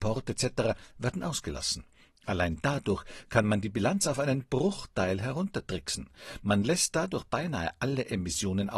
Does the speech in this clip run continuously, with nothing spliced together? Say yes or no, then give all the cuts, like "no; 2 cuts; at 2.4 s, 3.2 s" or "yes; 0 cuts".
yes; 0 cuts